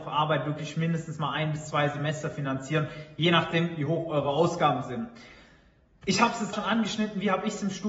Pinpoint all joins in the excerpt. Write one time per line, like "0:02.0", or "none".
0:06.5